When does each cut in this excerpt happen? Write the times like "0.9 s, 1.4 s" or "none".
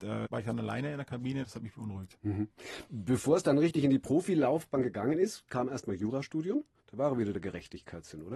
6.8 s